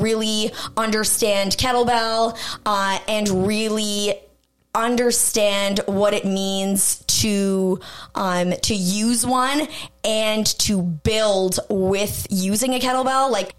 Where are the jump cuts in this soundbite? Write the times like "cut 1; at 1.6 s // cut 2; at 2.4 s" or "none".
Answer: none

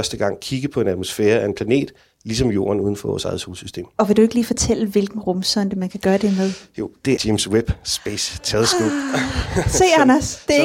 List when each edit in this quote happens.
cut 1; at 7.2 s

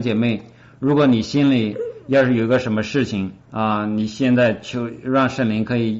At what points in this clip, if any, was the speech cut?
cut 1; at 3.4 s

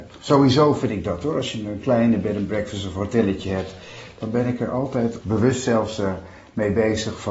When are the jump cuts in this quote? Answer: cut 1; at 5.2 s

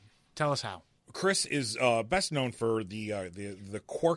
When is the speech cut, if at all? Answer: cut 1; at 1.0 s

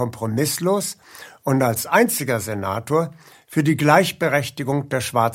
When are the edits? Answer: none

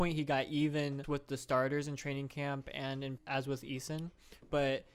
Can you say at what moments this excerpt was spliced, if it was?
cut 1; at 1.0 s // cut 2; at 3.2 s

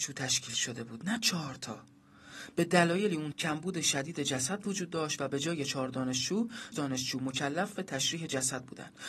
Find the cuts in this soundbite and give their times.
cut 1; at 3.3 s // cut 2; at 6.7 s

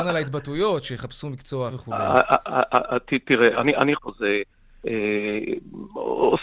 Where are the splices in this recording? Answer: cut 1; at 1.7 s // cut 2; at 4.0 s

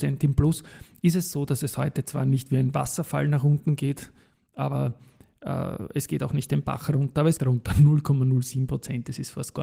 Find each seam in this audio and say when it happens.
cut 1; at 7.4 s

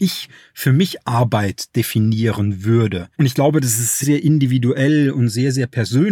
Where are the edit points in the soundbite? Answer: cut 1; at 3.1 s // cut 2; at 4.0 s

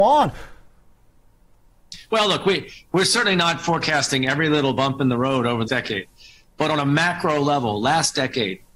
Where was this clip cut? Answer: cut 1; at 5.7 s

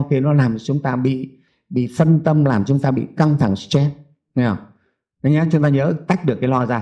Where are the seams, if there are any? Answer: none

